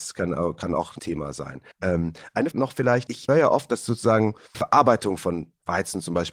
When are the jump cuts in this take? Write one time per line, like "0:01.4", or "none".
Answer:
0:01.0
0:01.7
0:02.5
0:03.3
0:04.5

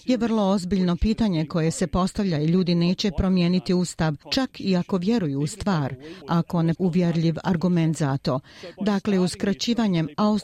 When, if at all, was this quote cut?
0:06.2
0:06.7

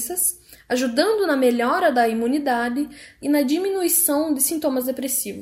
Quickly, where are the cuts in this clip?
0:03.2

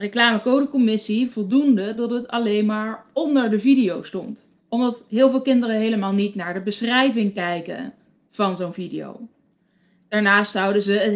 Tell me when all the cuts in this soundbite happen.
0:01.3
0:04.6

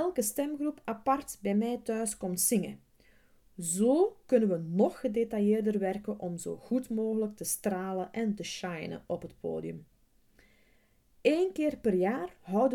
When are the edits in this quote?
none

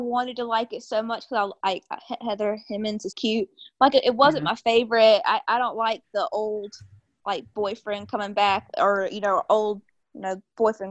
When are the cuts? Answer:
0:03.1

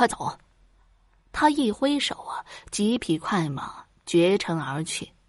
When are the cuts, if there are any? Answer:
none

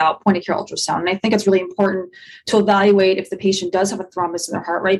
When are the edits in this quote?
none

